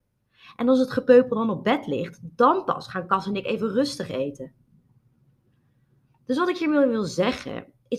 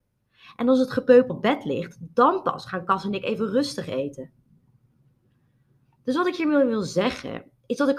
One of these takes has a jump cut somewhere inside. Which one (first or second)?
second